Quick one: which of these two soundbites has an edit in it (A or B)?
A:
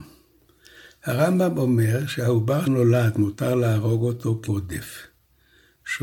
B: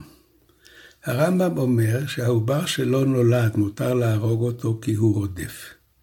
A